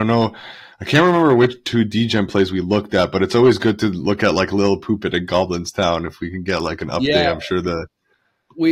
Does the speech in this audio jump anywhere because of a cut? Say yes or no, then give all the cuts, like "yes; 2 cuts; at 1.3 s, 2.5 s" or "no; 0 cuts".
no; 0 cuts